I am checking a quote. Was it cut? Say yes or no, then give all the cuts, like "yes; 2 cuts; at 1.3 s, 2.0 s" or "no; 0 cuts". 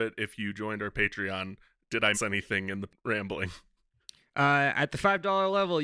yes; 2 cuts; at 2.1 s, 2.9 s